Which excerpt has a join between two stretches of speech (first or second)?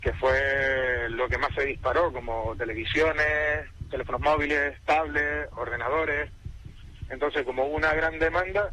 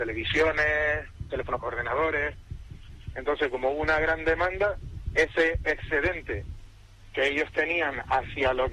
second